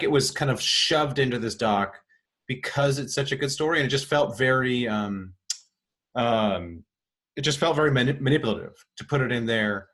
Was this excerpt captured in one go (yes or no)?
yes